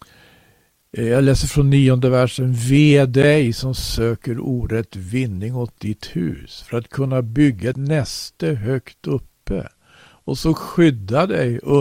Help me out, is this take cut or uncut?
cut